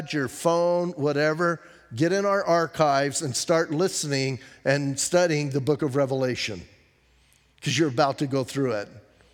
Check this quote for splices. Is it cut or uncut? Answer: uncut